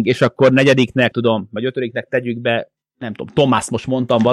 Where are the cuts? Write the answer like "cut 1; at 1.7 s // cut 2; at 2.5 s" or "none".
cut 1; at 1.1 s